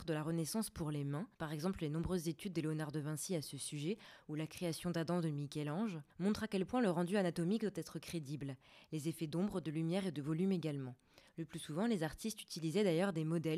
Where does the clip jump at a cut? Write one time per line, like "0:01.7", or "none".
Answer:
0:01.3
0:06.1